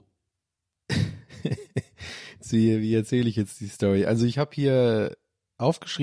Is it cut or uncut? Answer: uncut